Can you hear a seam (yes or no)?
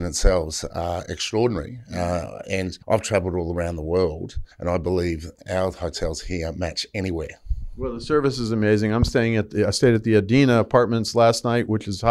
yes